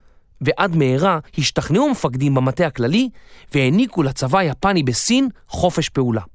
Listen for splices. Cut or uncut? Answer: cut